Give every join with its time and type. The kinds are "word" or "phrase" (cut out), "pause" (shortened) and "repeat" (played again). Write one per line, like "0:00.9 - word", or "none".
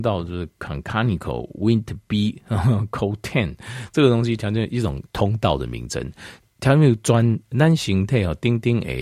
none